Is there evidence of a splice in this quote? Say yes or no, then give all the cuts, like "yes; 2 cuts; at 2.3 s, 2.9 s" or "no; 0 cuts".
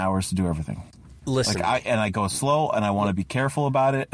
yes; 1 cut; at 1.2 s